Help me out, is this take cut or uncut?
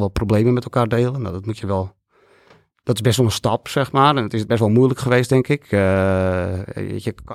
cut